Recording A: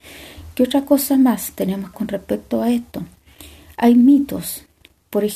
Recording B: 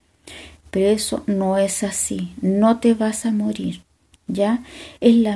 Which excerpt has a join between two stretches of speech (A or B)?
A